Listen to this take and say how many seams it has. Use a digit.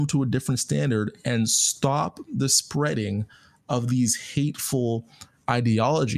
0